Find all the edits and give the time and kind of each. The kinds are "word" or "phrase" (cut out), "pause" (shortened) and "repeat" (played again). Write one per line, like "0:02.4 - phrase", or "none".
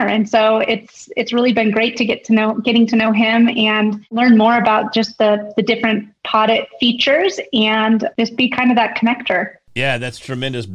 0:06.2 - pause